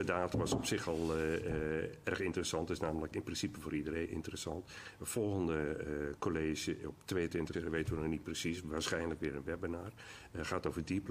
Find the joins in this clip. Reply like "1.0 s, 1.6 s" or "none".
4.1 s, 7.5 s